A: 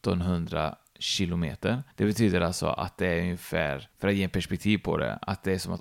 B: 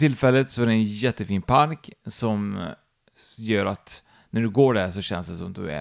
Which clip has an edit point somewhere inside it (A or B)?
A